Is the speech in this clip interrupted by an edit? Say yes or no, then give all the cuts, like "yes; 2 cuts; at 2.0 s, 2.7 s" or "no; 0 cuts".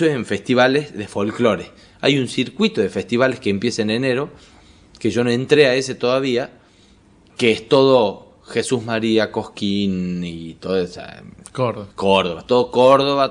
yes; 1 cut; at 11.9 s